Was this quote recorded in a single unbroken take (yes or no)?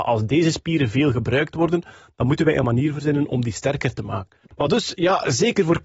yes